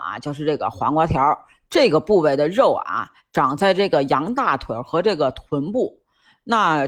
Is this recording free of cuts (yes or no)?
yes